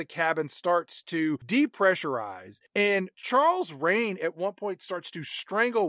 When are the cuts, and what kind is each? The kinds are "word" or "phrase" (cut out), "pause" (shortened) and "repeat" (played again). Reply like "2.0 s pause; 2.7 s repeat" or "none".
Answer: none